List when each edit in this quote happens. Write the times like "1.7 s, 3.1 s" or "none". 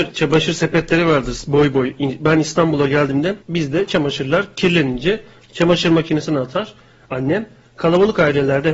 3.4 s